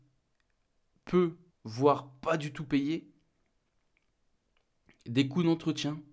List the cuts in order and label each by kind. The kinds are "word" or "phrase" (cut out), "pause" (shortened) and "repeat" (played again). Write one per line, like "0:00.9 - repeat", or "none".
0:01.5 - pause

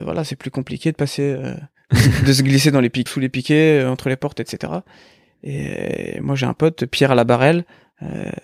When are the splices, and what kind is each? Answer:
0:03.1 - word

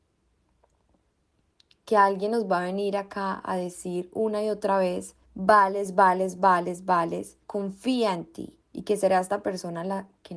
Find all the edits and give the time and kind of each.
0:05.2 - pause
0:07.4 - pause
0:08.6 - pause

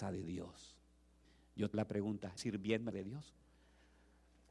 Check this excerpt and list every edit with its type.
0:01.2 - pause
0:01.7 - word
0:02.4 - word
0:02.9 - phrase

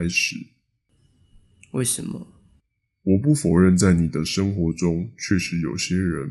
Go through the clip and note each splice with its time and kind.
0:02.6 - pause

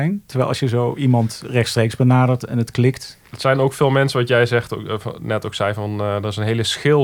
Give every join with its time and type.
none

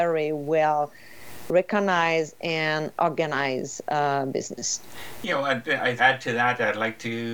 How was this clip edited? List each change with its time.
0:06.0 - phrase

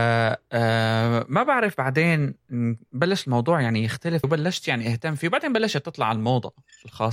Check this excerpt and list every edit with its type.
0:04.2 - word

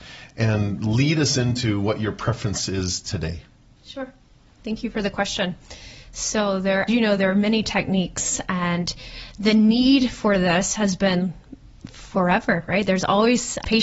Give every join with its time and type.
0:06.9 - word

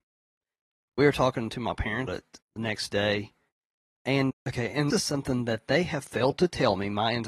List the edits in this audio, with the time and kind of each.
0:02.1 - word
0:02.4 - word
0:04.3 - word
0:04.9 - word

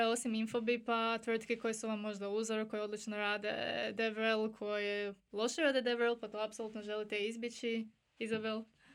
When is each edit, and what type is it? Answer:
none

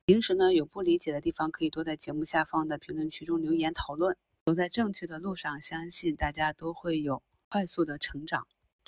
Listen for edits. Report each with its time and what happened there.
none

